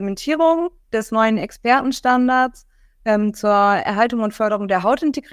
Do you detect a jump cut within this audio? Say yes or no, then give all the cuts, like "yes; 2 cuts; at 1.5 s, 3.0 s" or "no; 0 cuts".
no; 0 cuts